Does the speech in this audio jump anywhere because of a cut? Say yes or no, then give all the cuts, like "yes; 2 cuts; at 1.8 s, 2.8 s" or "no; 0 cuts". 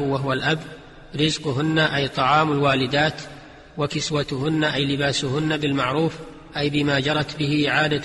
no; 0 cuts